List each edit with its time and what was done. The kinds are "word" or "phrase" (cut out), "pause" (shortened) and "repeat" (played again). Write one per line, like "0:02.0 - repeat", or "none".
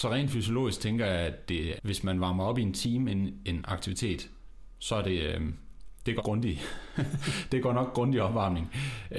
0:01.8 - word
0:06.2 - word